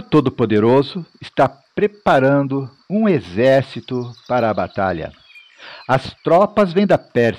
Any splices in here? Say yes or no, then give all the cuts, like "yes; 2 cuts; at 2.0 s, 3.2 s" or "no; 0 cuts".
no; 0 cuts